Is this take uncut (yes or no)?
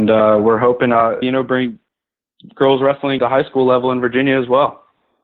no